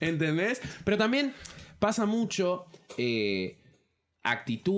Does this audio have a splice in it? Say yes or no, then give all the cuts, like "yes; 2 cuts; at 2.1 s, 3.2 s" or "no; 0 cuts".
no; 0 cuts